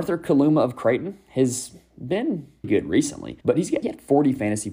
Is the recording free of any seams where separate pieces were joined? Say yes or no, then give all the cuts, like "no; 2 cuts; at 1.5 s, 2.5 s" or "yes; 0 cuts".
no; 3 cuts; at 2.6 s, 3.4 s, 3.8 s